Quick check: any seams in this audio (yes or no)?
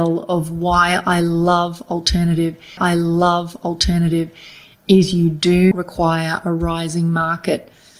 yes